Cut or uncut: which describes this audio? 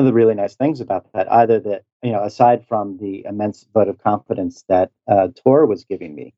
uncut